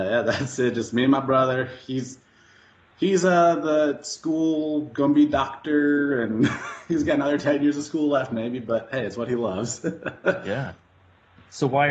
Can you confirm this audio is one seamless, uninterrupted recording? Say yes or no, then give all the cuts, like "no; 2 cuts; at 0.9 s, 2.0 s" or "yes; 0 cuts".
yes; 0 cuts